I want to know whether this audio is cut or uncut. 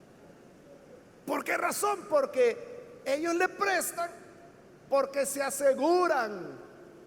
uncut